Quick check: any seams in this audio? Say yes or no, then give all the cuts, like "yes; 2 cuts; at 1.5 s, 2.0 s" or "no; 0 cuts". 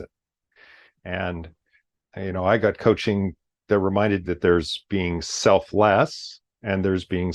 yes; 1 cut; at 4.2 s